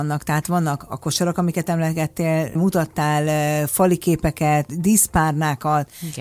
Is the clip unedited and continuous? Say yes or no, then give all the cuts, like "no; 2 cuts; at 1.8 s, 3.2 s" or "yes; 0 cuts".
no; 2 cuts; at 2.5 s, 4.7 s